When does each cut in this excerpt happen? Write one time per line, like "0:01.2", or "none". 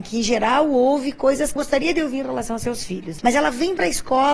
0:01.6